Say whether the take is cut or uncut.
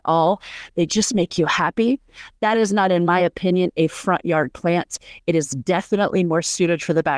uncut